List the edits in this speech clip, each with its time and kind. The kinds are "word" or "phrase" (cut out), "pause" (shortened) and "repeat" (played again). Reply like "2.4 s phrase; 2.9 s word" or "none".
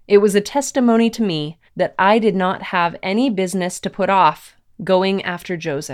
1.7 s pause